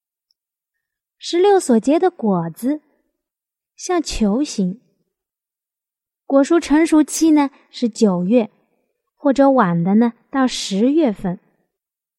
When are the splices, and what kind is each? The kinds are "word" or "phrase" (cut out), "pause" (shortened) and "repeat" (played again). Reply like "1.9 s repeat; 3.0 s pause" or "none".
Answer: none